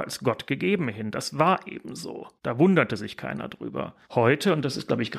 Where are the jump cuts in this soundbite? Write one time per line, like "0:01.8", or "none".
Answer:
0:02.4
0:04.0